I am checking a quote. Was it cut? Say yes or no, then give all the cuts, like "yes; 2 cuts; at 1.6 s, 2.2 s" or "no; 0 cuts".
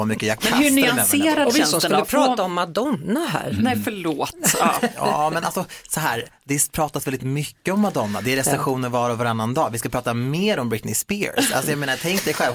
no; 0 cuts